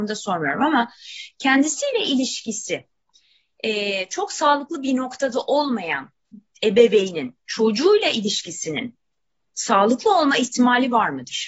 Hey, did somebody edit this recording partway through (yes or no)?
no